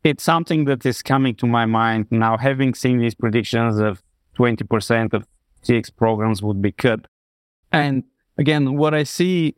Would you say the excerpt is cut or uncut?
uncut